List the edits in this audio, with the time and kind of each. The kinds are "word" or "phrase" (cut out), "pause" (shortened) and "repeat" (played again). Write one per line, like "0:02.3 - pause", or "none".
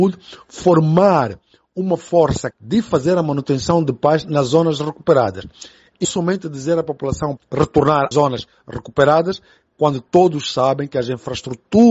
0:02.5 - word
0:06.0 - word
0:07.4 - word
0:08.1 - word